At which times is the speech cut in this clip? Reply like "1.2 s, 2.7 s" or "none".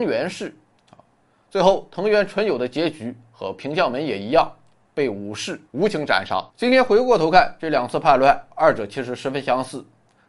5.7 s, 6.5 s, 8.5 s